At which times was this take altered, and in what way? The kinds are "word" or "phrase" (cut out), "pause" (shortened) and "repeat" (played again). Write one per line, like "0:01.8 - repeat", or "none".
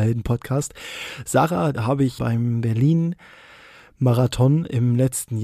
0:01.7 - word
0:02.2 - word